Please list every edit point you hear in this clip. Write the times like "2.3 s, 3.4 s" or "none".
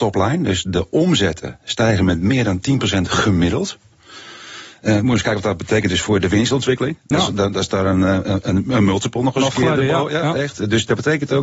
none